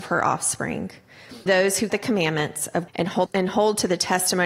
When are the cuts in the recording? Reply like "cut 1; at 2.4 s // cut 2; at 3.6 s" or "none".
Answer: cut 1; at 1.5 s // cut 2; at 1.9 s // cut 3; at 2.9 s // cut 4; at 3.3 s